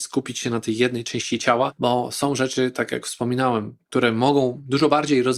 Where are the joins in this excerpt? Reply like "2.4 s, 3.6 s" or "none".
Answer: none